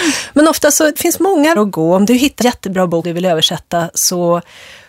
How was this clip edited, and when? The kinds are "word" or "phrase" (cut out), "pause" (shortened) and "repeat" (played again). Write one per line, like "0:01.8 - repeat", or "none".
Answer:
0:01.0 - word
0:01.6 - word
0:02.4 - word
0:03.0 - word